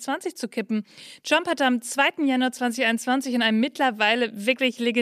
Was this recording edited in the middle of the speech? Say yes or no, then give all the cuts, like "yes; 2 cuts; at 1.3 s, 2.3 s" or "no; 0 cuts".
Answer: no; 0 cuts